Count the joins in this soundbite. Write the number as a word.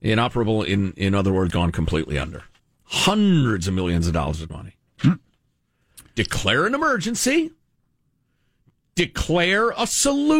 three